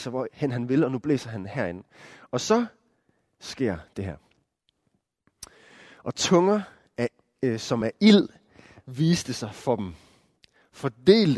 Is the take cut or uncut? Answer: uncut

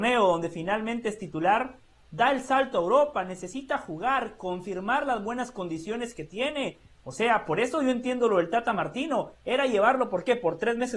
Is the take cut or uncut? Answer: uncut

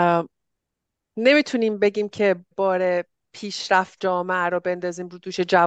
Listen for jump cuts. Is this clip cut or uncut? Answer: cut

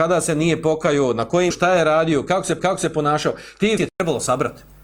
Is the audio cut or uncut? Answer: cut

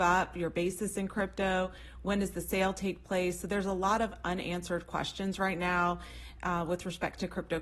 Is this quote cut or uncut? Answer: uncut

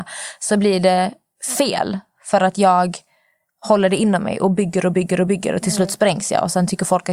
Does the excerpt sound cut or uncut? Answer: uncut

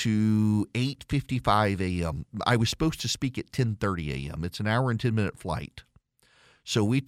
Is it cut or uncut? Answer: uncut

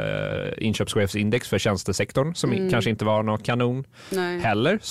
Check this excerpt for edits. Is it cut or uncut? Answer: uncut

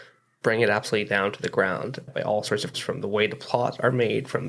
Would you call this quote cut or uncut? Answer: cut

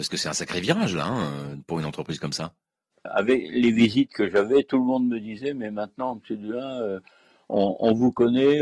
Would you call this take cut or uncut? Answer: uncut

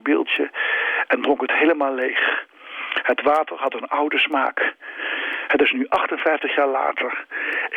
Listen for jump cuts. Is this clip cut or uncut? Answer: uncut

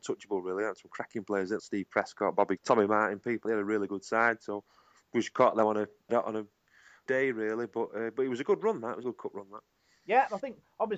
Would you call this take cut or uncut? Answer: cut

